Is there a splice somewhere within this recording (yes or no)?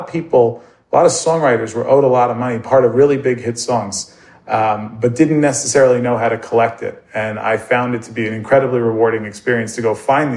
no